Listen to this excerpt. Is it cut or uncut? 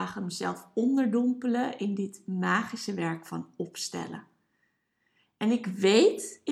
uncut